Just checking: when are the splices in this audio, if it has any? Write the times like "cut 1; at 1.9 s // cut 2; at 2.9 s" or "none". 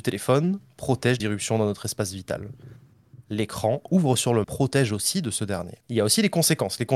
cut 1; at 1.2 s // cut 2; at 4.4 s // cut 3; at 5.8 s